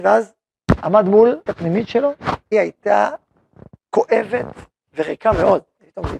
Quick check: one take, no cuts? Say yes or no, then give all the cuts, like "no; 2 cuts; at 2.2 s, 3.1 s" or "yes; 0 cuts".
no; 3 cuts; at 1.5 s, 2.5 s, 4.7 s